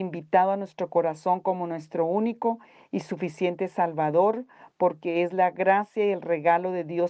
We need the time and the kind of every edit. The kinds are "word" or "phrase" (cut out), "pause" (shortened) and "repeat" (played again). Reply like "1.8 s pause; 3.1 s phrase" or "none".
none